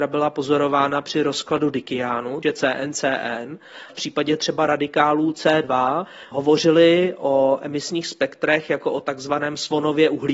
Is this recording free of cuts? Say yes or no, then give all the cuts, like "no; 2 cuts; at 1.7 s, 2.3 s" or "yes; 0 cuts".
no; 2 cuts; at 2.4 s, 3.9 s